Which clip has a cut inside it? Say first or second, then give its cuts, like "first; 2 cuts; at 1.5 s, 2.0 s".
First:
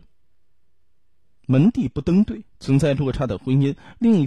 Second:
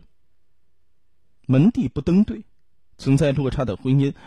first; 1 cut; at 2.5 s